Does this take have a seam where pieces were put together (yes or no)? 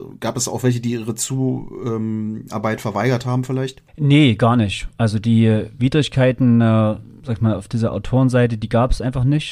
yes